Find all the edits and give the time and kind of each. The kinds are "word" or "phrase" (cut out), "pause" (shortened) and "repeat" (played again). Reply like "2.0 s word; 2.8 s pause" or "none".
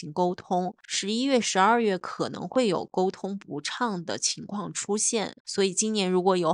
5.4 s pause